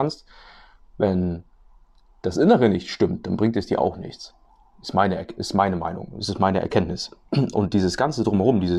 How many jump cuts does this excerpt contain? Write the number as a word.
one